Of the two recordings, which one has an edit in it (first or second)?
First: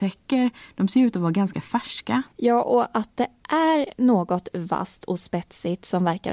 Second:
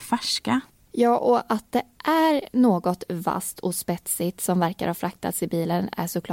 first